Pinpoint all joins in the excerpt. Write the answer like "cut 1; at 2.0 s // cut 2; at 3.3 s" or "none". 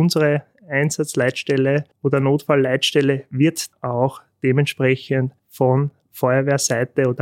cut 1; at 1.9 s // cut 2; at 3.7 s // cut 3; at 5.4 s